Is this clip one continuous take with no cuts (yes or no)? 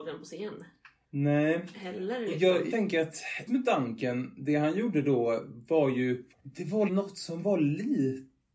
no